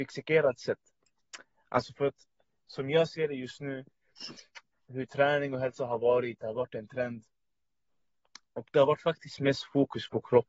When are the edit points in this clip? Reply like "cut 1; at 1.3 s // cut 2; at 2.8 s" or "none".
none